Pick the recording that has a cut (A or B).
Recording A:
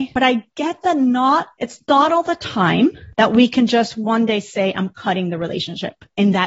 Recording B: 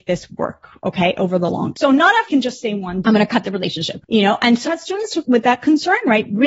B